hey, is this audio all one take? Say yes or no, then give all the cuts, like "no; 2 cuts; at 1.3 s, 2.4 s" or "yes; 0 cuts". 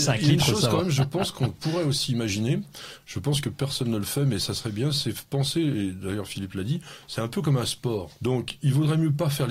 no; 2 cuts; at 5.3 s, 8.2 s